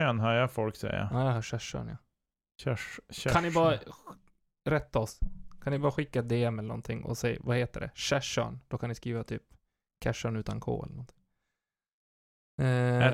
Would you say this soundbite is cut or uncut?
uncut